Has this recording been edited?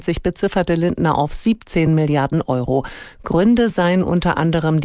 no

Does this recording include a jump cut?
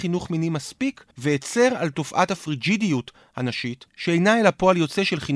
yes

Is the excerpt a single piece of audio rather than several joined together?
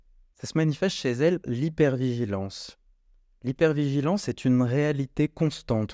no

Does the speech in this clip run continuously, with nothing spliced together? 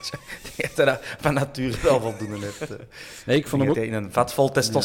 yes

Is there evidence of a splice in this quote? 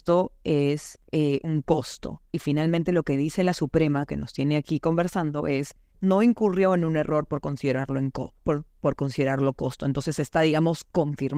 yes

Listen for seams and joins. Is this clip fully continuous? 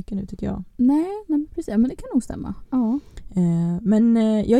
yes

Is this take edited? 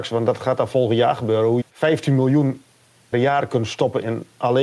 yes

